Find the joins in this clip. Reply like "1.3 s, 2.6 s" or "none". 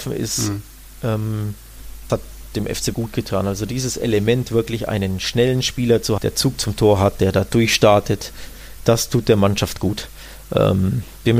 2.1 s, 2.9 s, 6.2 s